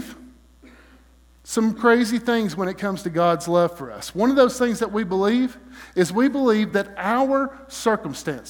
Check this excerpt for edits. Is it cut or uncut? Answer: uncut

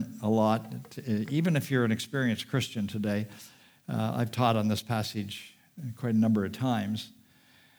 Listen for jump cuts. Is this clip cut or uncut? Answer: uncut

